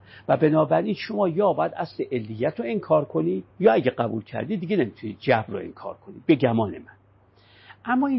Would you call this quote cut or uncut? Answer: cut